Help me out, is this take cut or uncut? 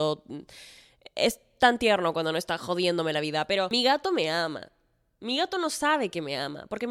uncut